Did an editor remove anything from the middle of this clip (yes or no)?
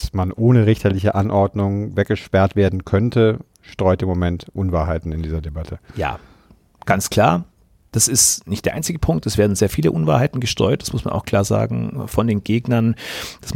no